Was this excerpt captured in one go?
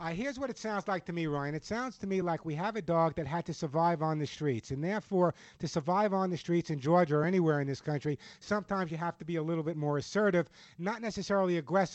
yes; 0 cuts

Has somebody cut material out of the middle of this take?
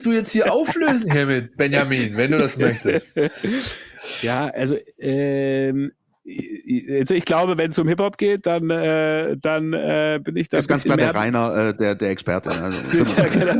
no; 0 cuts

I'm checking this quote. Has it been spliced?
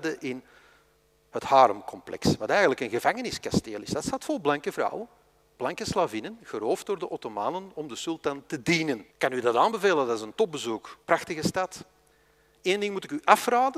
yes; 2 cuts; at 9.1 s, 11.0 s

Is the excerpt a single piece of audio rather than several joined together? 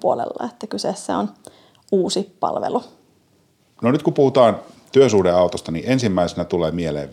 yes; 0 cuts

